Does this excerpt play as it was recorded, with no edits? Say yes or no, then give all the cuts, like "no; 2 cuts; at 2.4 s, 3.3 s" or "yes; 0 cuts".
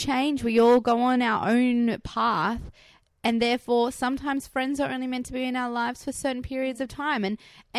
yes; 0 cuts